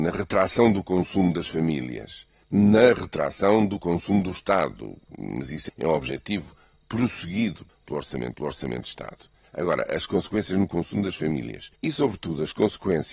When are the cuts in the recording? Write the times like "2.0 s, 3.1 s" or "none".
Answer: 5.7 s, 8.3 s, 11.8 s